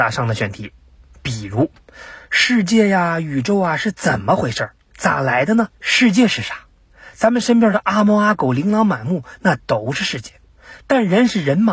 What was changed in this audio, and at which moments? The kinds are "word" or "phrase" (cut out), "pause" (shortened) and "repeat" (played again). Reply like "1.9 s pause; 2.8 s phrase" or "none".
5.7 s pause